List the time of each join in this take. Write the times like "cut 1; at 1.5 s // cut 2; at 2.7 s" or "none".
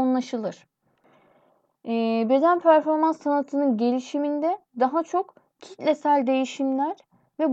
cut 1; at 4.7 s